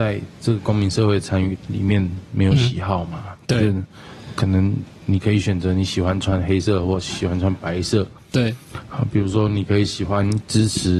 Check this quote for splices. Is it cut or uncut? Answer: uncut